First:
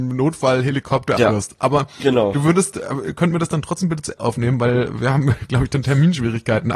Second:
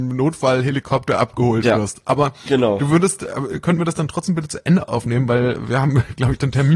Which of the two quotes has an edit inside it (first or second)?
first